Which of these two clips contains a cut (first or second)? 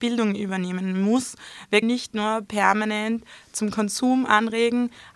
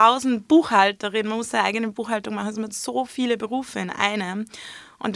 first